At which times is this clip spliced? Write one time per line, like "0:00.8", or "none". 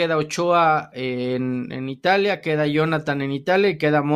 none